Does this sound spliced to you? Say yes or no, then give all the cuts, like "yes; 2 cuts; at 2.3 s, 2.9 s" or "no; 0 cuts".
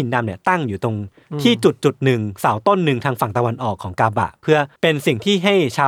yes; 1 cut; at 4.8 s